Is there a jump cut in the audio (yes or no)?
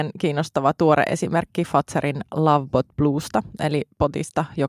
no